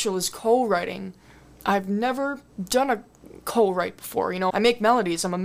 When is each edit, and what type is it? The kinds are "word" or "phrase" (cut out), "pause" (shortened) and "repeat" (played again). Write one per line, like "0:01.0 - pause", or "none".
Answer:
0:04.5 - word